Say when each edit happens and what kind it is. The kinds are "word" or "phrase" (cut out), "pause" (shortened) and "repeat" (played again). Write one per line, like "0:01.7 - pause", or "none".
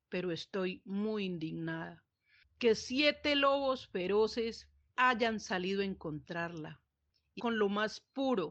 0:04.9 - pause
0:07.4 - word